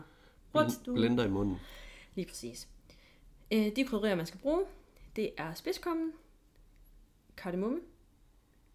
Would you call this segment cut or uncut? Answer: uncut